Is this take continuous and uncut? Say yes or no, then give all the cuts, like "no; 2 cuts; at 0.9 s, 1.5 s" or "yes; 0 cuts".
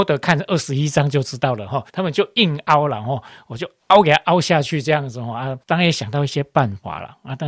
no; 2 cuts; at 1.9 s, 5.6 s